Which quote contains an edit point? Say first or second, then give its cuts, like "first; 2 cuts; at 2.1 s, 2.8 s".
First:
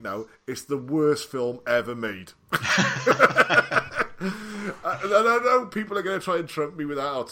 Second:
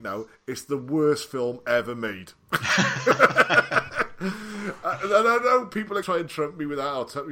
second; 1 cut; at 6.0 s